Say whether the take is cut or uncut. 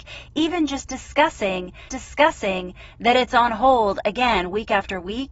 cut